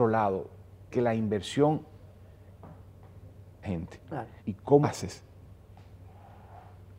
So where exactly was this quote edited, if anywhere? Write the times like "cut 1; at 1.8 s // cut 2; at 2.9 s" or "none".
cut 1; at 0.9 s // cut 2; at 3.6 s // cut 3; at 4.4 s // cut 4; at 4.8 s